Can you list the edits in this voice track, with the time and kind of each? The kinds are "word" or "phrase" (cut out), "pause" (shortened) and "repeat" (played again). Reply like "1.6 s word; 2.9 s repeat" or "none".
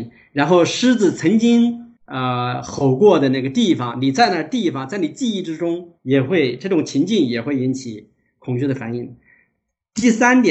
2.0 s pause; 6.0 s pause